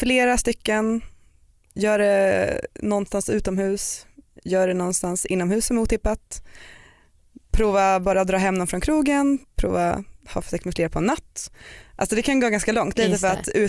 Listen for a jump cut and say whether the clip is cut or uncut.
uncut